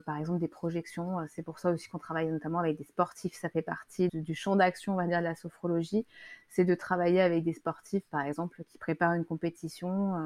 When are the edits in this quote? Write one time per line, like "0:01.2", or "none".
0:04.1